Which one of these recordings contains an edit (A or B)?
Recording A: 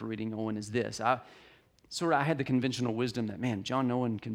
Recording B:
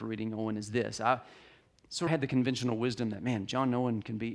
B